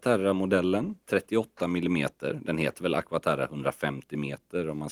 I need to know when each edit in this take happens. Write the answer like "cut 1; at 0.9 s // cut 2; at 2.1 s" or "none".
cut 1; at 1.0 s